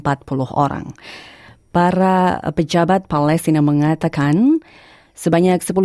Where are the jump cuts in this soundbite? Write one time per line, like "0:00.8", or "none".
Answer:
none